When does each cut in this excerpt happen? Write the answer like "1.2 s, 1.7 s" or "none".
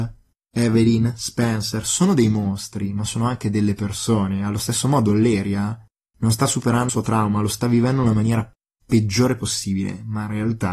6.9 s